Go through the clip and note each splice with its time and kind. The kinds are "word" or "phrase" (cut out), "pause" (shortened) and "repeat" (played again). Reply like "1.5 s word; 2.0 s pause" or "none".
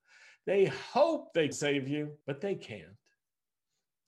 1.5 s word; 2.2 s pause